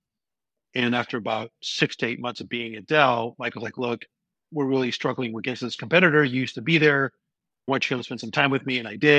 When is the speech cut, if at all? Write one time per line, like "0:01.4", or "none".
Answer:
none